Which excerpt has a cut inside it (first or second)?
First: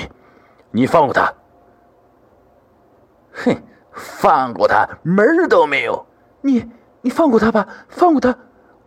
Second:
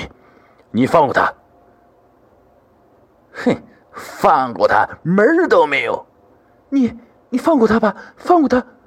first